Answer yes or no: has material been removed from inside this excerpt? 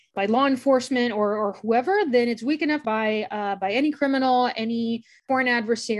yes